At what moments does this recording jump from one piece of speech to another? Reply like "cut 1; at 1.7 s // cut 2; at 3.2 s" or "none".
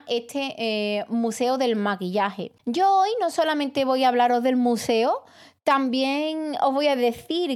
cut 1; at 2.6 s